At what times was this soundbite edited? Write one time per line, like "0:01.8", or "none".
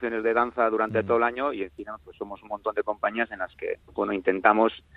0:03.8